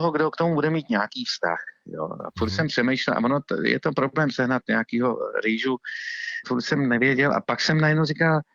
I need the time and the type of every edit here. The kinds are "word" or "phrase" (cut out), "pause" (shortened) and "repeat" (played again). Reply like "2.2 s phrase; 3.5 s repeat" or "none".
none